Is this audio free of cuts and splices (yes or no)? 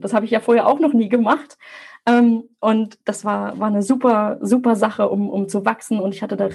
yes